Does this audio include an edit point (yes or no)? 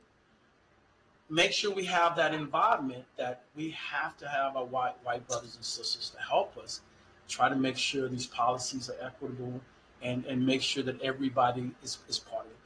no